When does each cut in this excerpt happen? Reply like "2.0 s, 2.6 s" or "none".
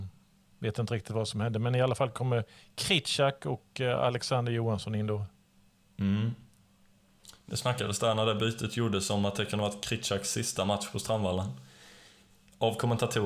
none